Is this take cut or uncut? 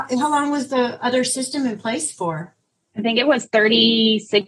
uncut